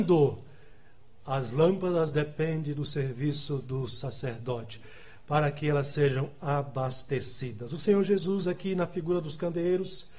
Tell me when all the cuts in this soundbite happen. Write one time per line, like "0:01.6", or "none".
none